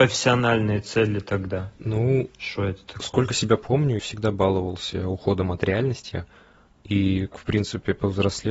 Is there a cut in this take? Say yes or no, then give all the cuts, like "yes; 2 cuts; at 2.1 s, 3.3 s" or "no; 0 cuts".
yes; 2 cuts; at 4.0 s, 7.3 s